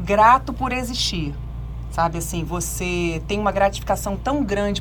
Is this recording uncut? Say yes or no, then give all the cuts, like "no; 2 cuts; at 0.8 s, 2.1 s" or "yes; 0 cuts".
yes; 0 cuts